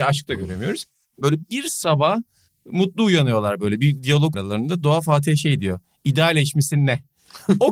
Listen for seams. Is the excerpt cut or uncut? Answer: cut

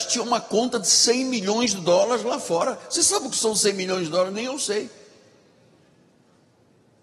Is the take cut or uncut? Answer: uncut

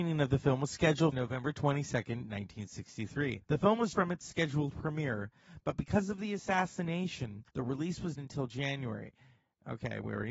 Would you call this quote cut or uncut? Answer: cut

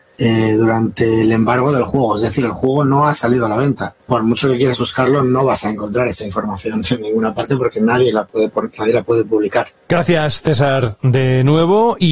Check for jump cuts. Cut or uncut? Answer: cut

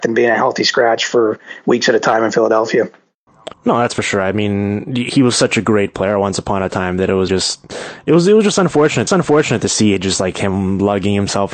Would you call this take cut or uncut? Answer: cut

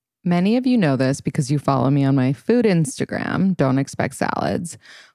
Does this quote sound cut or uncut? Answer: uncut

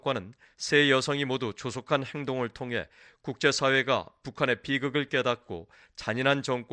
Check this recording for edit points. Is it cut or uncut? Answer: uncut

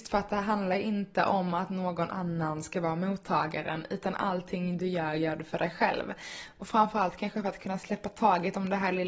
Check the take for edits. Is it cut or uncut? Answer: uncut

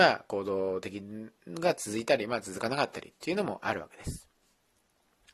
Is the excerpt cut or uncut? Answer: cut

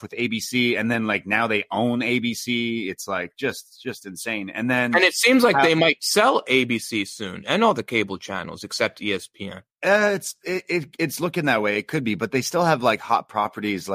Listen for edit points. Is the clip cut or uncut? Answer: cut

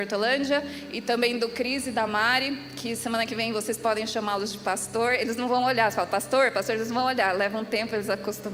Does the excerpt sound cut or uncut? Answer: uncut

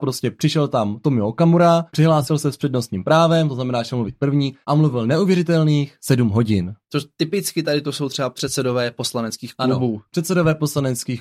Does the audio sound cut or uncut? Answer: cut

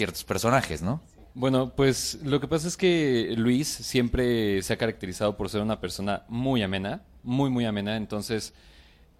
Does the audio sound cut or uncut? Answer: cut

